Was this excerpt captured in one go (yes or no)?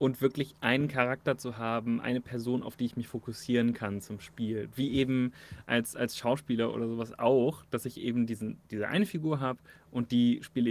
yes